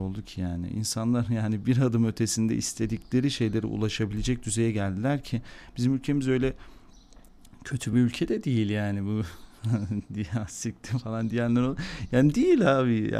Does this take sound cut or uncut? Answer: uncut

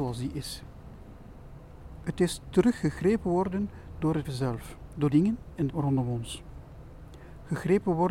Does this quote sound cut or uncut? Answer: cut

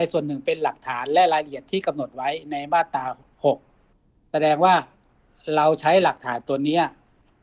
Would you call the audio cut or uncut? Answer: uncut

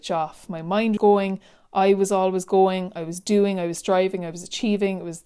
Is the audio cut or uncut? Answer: cut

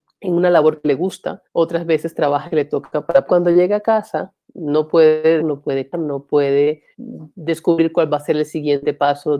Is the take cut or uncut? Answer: cut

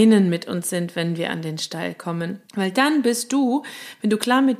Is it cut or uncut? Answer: cut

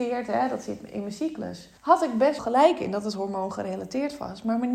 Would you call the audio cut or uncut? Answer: cut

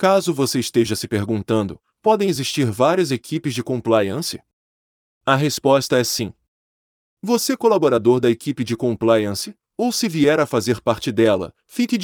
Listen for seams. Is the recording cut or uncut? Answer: uncut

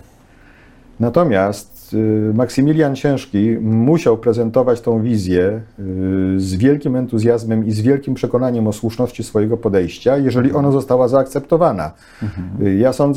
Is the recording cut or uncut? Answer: uncut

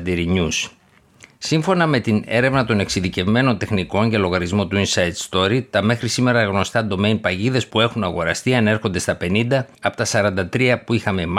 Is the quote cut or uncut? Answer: cut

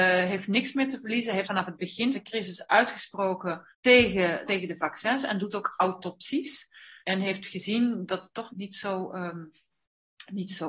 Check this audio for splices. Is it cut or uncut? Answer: cut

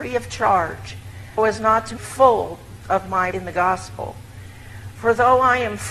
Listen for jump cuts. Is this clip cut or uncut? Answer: cut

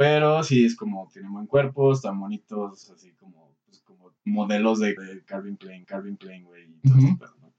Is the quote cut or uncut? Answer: cut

